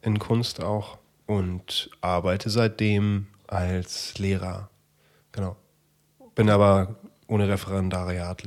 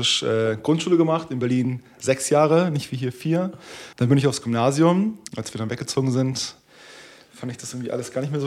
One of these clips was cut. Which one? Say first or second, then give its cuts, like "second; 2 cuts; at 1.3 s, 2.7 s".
second; 2 cuts; at 3.9 s, 5.3 s